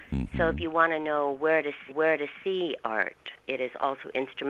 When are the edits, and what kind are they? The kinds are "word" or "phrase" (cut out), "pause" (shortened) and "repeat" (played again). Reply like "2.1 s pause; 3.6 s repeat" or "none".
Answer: 1.9 s repeat; 3.4 s pause

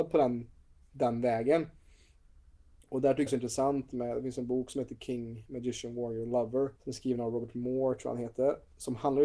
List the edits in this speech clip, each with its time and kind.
3.3 s phrase; 6.8 s pause

